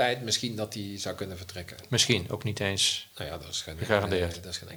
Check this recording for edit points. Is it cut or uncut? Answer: uncut